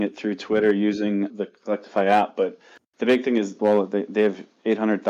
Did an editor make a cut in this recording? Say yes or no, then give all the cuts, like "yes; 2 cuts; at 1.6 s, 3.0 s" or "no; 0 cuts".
yes; 2 cuts; at 1.3 s, 3.6 s